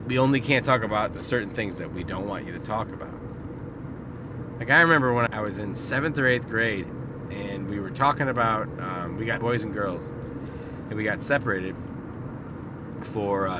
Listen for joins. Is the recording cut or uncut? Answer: cut